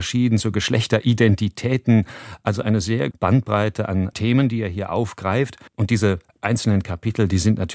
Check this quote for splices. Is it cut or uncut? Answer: cut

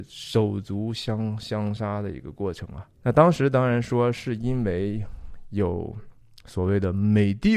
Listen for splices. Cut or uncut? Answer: cut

